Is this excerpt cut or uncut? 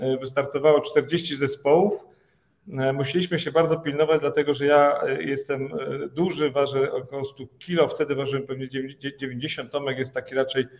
uncut